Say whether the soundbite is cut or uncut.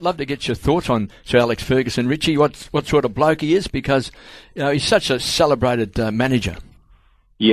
uncut